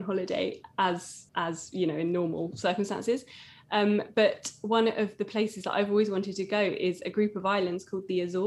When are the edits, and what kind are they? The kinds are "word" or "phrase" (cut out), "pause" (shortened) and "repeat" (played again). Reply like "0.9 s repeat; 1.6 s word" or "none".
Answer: 1.3 s pause